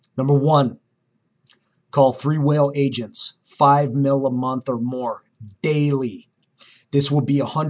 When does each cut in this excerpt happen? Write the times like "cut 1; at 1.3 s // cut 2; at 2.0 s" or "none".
none